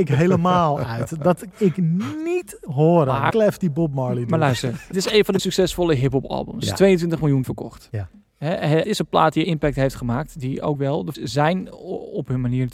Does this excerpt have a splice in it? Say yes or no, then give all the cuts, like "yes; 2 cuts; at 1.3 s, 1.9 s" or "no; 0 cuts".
yes; 9 cuts; at 1.5 s, 3.3 s, 4.9 s, 5.4 s, 7.4 s, 8.8 s, 9.4 s, 10.7 s, 11.1 s